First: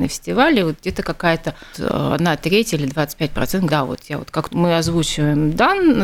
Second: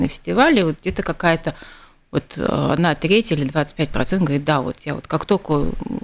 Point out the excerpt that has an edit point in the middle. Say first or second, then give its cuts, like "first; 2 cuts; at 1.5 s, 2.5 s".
first; 3 cuts; at 1.7 s, 3.7 s, 4.5 s